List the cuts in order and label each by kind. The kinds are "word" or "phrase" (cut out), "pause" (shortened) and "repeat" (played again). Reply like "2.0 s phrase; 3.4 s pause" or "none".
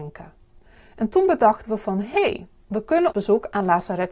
3.1 s word

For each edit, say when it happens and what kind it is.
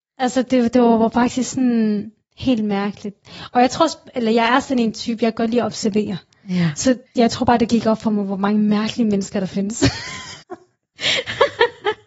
7.1 s pause; 10.4 s pause

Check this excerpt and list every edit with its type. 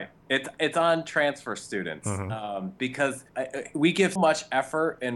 3.3 s pause; 4.2 s word

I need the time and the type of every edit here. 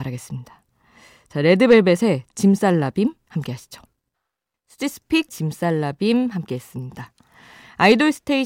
5.3 s phrase

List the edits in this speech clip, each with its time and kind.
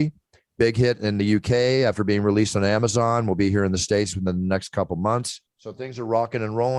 5.5 s pause

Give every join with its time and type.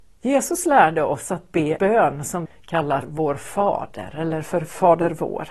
1.8 s word; 2.4 s word; 3.0 s word

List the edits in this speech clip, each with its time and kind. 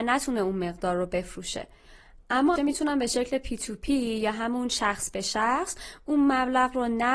2.6 s phrase

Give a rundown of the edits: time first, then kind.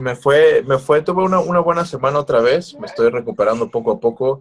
none

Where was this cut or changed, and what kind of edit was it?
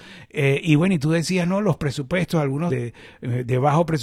2.7 s word

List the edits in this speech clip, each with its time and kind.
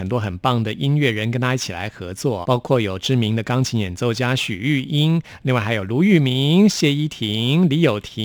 2.4 s word

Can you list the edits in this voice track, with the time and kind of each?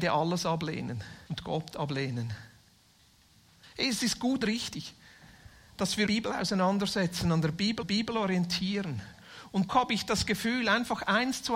1.3 s pause; 3.0 s pause; 4.4 s word; 6.1 s phrase; 7.8 s repeat; 9.7 s word

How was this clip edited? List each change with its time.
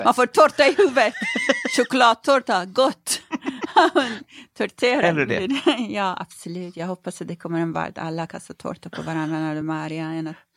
none

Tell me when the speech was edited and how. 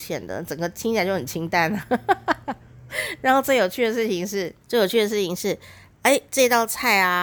4.6 s pause

